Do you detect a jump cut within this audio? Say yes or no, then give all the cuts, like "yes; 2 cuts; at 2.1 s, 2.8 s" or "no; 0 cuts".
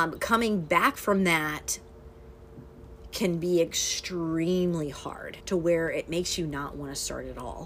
yes; 1 cut; at 5.4 s